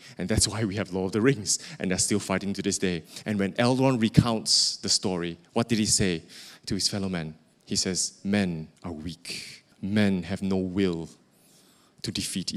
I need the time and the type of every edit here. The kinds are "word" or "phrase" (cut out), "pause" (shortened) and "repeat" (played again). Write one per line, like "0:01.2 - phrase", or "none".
0:08.8 - pause
0:09.7 - pause